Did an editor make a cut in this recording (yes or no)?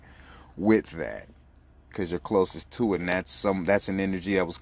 yes